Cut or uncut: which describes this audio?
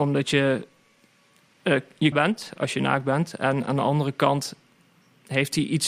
cut